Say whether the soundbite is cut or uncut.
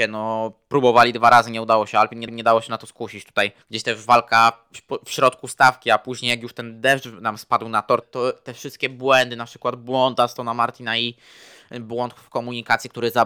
cut